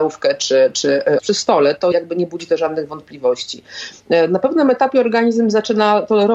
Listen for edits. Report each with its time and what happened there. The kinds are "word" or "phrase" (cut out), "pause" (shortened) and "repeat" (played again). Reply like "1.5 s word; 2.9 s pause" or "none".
1.2 s phrase; 1.9 s word